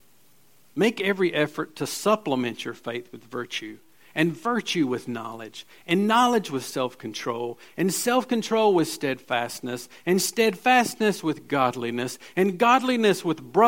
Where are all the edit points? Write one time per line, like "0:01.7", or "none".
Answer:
none